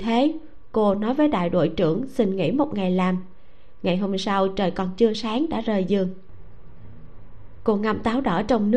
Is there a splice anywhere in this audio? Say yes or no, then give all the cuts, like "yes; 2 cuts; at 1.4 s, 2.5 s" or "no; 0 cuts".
no; 0 cuts